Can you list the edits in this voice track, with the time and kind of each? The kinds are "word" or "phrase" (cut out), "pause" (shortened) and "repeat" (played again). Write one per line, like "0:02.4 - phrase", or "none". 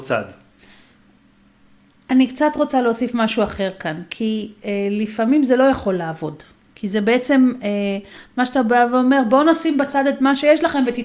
none